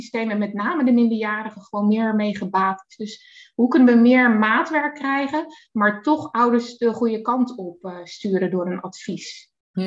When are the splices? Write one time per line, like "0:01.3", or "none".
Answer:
none